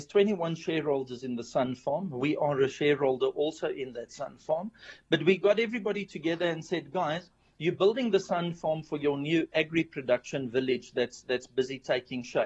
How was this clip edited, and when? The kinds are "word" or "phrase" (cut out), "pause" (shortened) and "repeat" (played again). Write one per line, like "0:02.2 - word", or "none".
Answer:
none